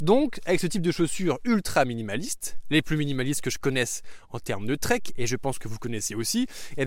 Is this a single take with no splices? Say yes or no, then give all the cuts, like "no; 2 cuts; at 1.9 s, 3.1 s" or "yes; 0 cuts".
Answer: yes; 0 cuts